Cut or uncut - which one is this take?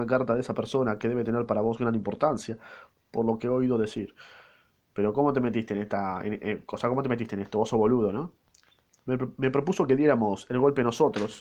uncut